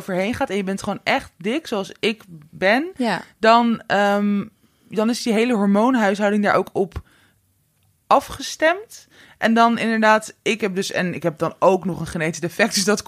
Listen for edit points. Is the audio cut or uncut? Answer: uncut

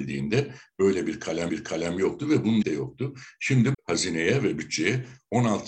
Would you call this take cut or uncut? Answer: cut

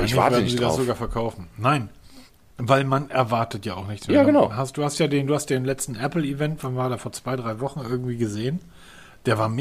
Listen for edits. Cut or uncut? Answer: cut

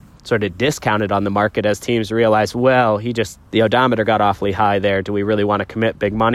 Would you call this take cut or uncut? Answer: cut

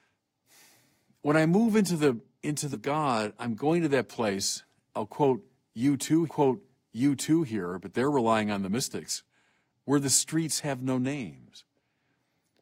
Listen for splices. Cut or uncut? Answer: cut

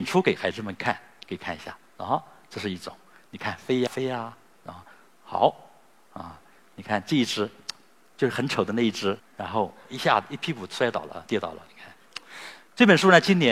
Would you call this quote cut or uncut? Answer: cut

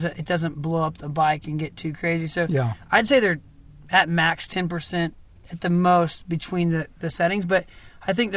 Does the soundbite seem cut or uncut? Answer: uncut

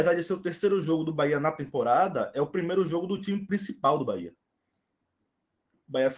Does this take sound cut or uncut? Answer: uncut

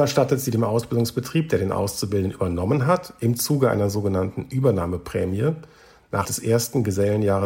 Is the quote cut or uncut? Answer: cut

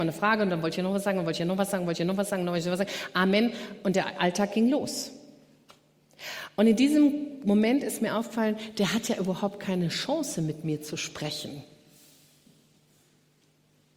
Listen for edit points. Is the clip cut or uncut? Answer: uncut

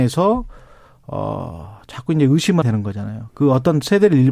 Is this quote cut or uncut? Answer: cut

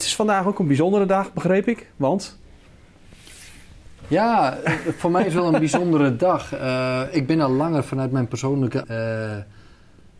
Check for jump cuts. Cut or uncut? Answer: cut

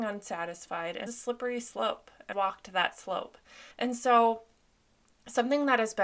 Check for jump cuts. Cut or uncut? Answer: cut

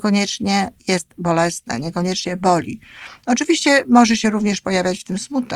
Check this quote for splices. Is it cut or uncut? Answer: uncut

